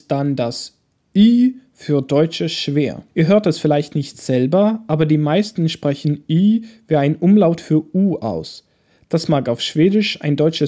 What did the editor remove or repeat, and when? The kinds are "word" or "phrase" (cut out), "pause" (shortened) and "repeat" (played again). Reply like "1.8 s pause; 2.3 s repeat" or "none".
3.1 s pause